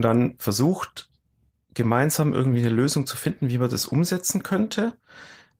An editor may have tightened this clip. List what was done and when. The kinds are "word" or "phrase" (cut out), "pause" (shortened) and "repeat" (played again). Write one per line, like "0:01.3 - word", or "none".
none